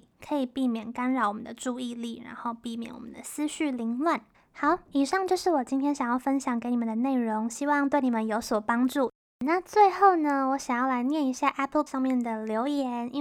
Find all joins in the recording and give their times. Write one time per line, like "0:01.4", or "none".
0:04.3
0:11.9

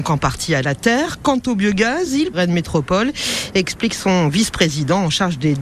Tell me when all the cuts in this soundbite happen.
0:02.3

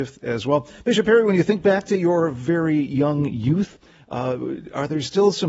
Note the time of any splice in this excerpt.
none

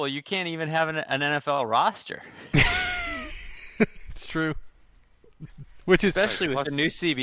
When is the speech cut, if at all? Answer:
none

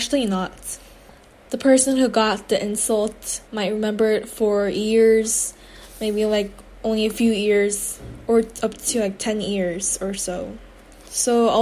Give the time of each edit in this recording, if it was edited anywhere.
0:03.5

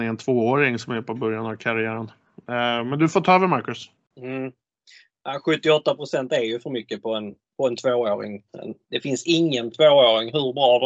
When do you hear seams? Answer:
0:04.0

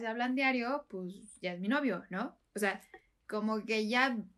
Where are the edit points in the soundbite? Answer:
none

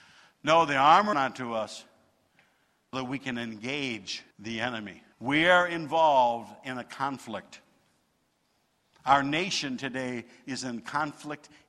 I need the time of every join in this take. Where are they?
0:01.1
0:02.9
0:04.3
0:05.1

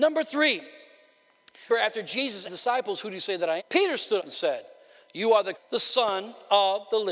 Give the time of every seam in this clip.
0:01.7
0:02.4
0:03.6
0:04.2
0:05.5

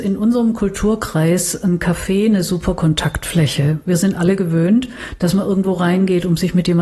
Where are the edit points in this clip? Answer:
none

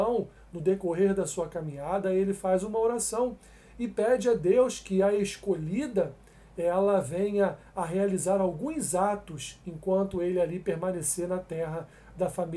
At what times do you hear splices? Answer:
none

